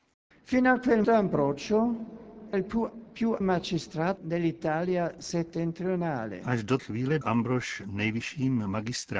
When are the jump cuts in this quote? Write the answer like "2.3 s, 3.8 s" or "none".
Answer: 1.0 s, 2.5 s, 3.4 s, 4.2 s, 6.8 s, 7.2 s